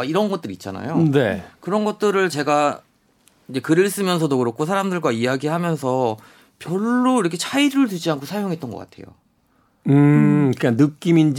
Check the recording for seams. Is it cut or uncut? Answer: uncut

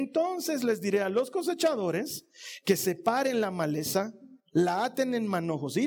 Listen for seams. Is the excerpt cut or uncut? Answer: cut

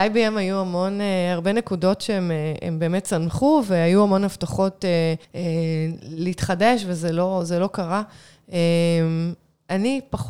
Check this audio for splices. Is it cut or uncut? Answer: cut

